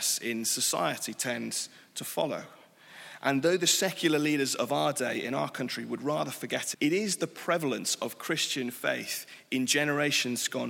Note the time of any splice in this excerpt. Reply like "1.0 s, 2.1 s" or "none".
6.7 s